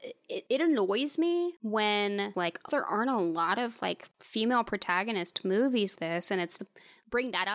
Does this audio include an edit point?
yes; 4 cuts; at 2.3 s, 2.7 s, 6.0 s, 6.6 s

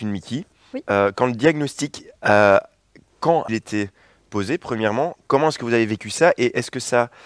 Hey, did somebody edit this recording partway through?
yes; 1 cut; at 3.5 s

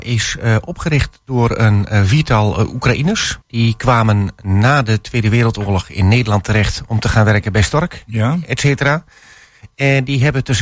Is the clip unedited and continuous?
no; 1 cut; at 3.4 s

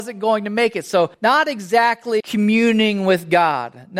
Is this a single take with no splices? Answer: no; 2 cuts; at 1.1 s, 2.2 s

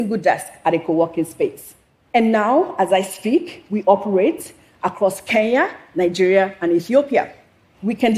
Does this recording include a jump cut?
no; 0 cuts

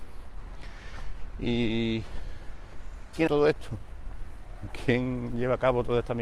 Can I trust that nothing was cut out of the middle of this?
no; 1 cut; at 3.3 s

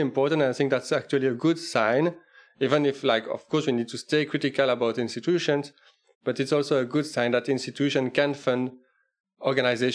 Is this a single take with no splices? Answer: yes; 0 cuts

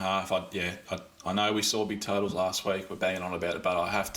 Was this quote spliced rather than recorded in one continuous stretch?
no; 0 cuts

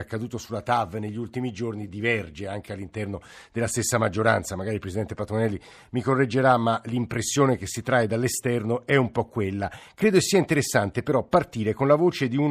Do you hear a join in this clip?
no; 0 cuts

